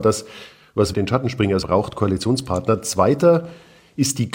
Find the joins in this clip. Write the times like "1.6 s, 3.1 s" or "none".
0.9 s, 1.6 s